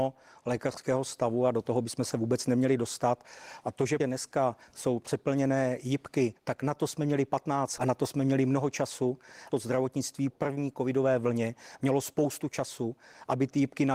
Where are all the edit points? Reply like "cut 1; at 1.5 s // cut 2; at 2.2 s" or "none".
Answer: cut 1; at 4.0 s // cut 2; at 6.4 s // cut 3; at 7.8 s // cut 4; at 9.5 s // cut 5; at 10.3 s